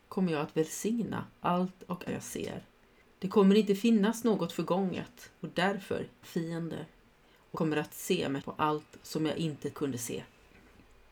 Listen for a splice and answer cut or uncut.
cut